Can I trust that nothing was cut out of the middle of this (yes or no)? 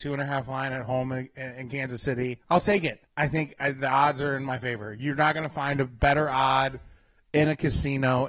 no